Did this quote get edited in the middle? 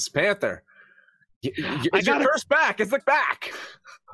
yes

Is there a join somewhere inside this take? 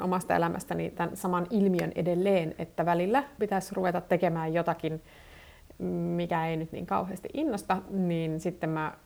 yes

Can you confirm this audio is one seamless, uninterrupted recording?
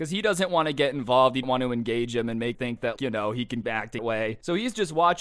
no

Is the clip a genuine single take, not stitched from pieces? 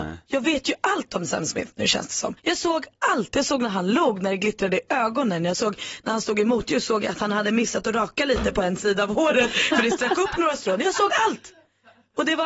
no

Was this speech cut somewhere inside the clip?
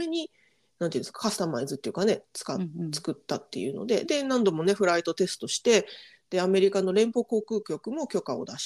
no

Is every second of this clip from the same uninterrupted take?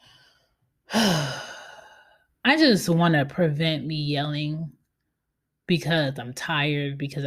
yes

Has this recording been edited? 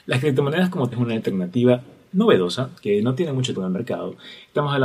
yes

